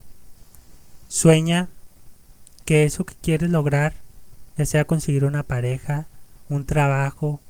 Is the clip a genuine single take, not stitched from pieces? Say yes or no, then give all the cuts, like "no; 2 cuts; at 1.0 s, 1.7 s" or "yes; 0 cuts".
yes; 0 cuts